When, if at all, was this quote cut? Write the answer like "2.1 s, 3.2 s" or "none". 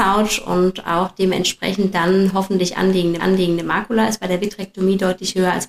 3.2 s